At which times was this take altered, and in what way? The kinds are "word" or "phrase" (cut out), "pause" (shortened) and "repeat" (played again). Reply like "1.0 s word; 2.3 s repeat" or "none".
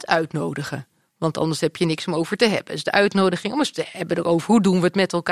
none